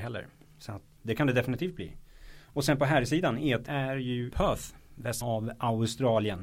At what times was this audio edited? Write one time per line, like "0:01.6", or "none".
0:01.0
0:03.7
0:04.3
0:05.2